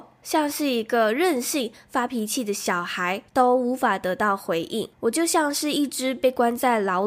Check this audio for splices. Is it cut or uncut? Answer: cut